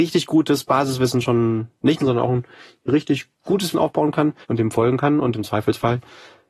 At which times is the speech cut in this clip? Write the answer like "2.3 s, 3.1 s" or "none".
2.0 s, 3.7 s, 4.4 s